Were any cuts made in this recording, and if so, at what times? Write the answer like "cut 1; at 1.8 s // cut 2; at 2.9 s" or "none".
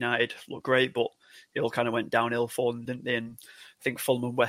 none